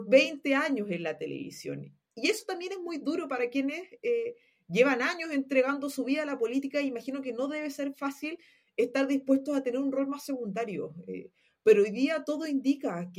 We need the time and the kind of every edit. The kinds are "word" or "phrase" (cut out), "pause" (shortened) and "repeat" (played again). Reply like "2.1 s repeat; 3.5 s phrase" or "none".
none